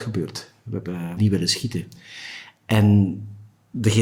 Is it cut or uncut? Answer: cut